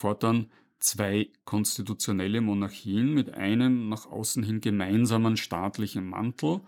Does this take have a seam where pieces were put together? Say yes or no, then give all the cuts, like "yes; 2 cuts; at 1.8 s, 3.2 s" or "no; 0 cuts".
no; 0 cuts